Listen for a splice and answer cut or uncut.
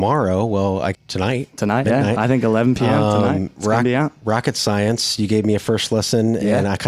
cut